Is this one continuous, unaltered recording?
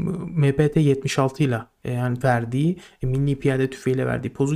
no; 1 cut; at 2.2 s

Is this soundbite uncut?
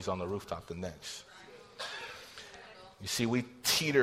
yes; 0 cuts

